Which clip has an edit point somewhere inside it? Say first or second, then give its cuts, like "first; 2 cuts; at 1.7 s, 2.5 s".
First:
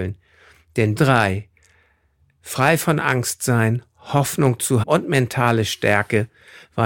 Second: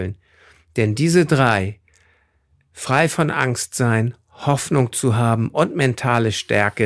first; 2 cuts; at 1.0 s, 4.8 s